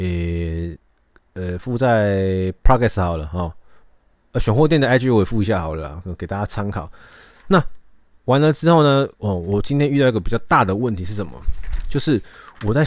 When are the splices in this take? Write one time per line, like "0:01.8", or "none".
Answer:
none